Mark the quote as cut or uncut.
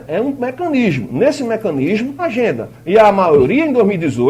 cut